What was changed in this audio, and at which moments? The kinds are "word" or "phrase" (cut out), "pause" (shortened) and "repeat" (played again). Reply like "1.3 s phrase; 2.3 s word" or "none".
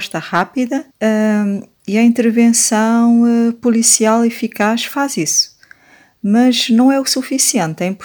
0.9 s pause